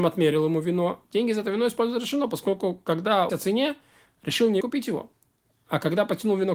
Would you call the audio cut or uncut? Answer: cut